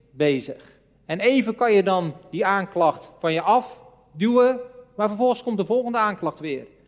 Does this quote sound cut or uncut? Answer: uncut